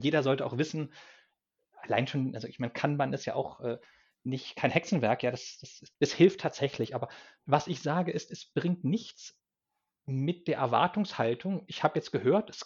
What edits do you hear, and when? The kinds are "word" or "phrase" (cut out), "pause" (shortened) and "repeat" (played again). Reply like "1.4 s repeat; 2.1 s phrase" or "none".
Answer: none